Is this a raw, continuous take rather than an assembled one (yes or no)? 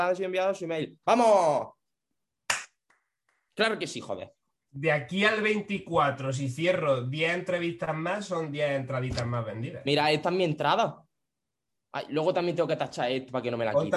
yes